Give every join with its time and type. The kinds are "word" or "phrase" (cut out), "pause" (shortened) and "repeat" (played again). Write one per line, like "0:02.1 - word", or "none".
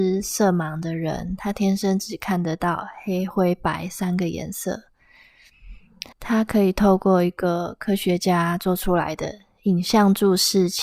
0:06.1 - pause